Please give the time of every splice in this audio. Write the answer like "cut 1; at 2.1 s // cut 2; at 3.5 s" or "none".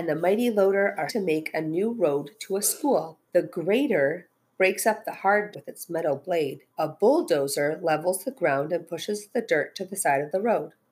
cut 1; at 1.1 s // cut 2; at 3.2 s // cut 3; at 5.5 s // cut 4; at 6.7 s